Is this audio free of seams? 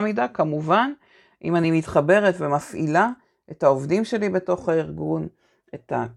yes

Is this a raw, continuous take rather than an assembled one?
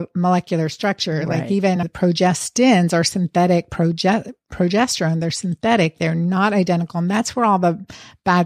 yes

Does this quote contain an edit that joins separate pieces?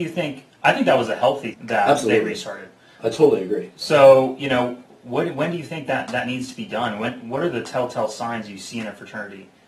yes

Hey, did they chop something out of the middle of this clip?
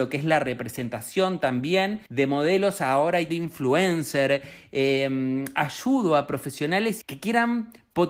yes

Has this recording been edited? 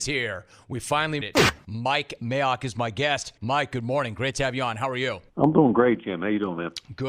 yes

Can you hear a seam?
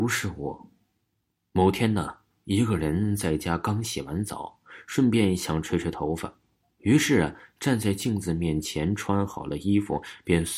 no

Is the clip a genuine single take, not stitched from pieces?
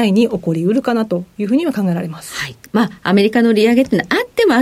no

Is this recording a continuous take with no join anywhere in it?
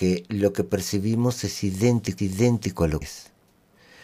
no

